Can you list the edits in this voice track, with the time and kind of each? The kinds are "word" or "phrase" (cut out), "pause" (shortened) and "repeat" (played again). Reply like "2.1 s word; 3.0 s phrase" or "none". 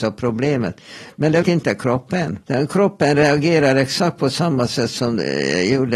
1.4 s word; 2.4 s pause